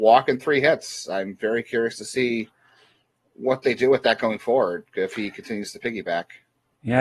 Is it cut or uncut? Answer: uncut